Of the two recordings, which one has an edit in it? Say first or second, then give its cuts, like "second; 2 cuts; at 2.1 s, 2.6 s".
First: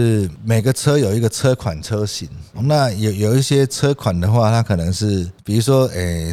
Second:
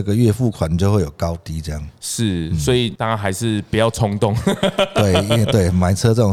first; 1 cut; at 2.5 s